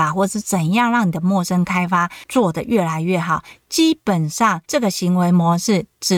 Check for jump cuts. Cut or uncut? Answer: cut